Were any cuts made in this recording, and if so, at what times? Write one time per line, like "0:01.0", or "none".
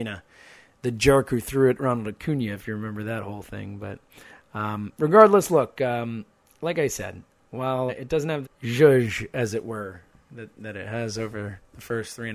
0:07.9
0:08.4